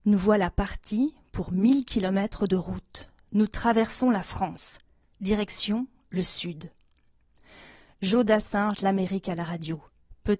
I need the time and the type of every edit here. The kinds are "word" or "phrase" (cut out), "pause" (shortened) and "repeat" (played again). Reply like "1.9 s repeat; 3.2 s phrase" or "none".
8.7 s word